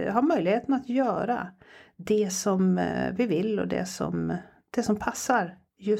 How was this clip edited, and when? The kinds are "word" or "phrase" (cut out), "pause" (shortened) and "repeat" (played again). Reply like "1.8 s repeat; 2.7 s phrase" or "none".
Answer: none